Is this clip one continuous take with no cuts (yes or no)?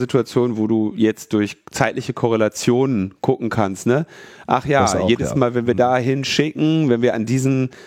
yes